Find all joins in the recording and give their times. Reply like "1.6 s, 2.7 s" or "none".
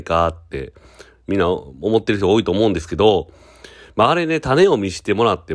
none